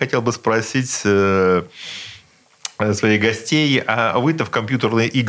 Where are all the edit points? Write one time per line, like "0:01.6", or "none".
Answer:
none

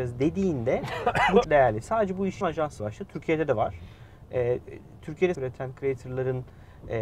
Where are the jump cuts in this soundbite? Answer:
0:01.4
0:02.4
0:02.8
0:05.3

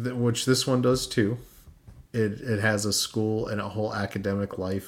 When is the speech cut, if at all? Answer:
0:02.1

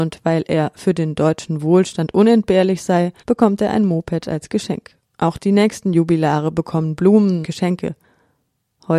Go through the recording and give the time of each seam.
0:03.2
0:05.1
0:07.4

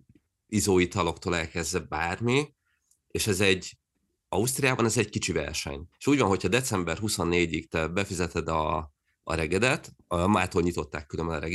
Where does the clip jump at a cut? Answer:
0:05.9
0:10.0

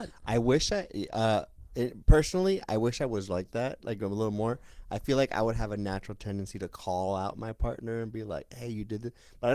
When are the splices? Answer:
0:01.7

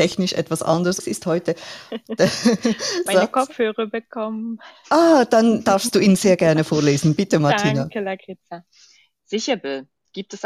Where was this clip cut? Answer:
0:01.0
0:03.1

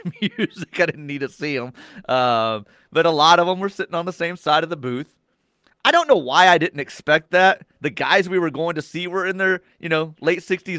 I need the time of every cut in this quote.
none

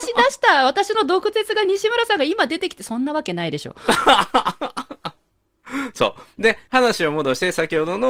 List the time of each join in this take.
0:06.6

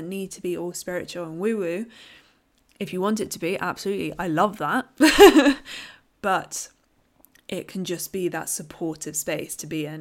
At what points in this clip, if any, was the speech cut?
none

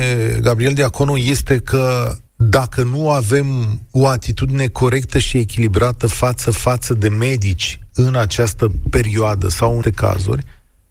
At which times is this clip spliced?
0:02.3
0:06.4
0:09.8

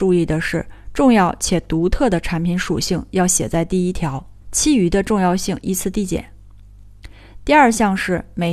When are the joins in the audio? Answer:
0:04.4

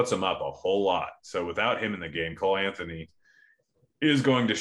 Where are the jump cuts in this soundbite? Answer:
none

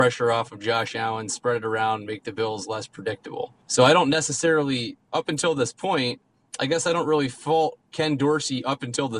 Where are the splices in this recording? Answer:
0:03.6
0:07.9

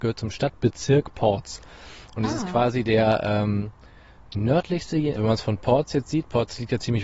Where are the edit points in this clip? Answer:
0:05.1

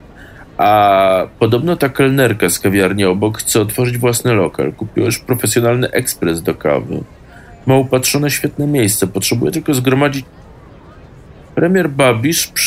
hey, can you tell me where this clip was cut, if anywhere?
0:11.5

